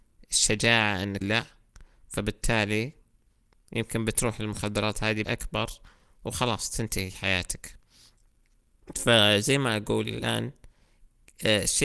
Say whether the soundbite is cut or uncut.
cut